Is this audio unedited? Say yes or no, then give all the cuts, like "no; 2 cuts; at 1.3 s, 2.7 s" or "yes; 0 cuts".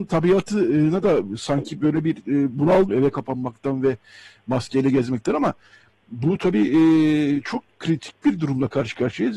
no; 1 cut; at 2.9 s